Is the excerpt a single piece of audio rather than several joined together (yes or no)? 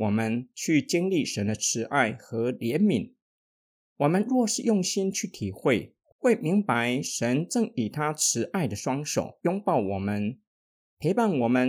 yes